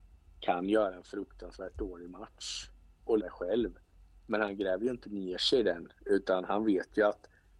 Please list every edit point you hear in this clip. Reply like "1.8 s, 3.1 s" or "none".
3.2 s